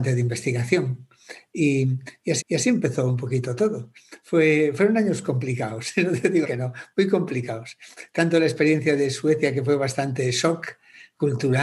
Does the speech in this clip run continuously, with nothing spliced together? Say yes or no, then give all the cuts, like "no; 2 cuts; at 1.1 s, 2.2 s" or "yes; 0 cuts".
no; 2 cuts; at 2.4 s, 6.4 s